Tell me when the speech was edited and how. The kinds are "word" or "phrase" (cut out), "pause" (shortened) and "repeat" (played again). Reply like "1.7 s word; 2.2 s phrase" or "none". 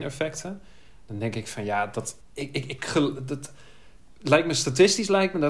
2.2 s pause